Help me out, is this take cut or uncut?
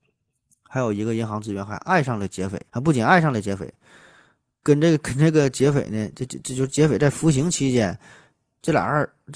cut